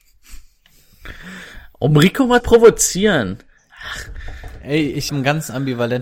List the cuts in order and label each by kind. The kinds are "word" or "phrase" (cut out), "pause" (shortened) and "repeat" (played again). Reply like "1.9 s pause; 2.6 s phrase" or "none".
2.4 s word; 5.1 s word